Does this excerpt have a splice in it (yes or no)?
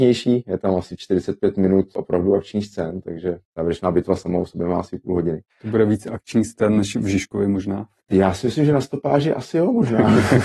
yes